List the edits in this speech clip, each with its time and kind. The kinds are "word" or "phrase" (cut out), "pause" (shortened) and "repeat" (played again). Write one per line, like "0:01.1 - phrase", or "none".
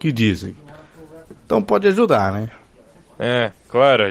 none